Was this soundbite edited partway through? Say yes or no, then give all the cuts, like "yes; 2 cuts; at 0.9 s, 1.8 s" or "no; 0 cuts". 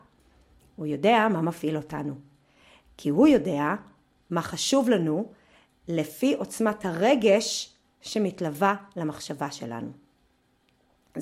no; 0 cuts